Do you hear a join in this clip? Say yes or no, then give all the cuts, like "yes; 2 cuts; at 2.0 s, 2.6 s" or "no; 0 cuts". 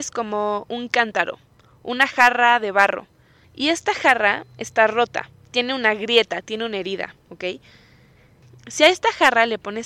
no; 0 cuts